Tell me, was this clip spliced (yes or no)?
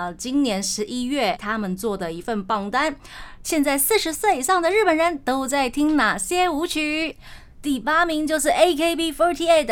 yes